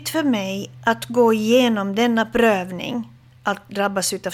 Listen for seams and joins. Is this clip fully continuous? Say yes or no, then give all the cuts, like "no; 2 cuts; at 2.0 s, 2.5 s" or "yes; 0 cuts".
yes; 0 cuts